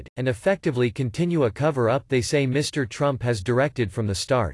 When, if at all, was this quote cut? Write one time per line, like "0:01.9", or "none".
none